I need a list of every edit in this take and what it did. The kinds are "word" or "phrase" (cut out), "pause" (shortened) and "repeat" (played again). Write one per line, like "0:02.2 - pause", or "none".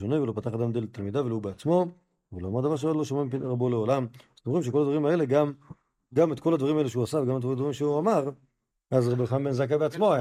none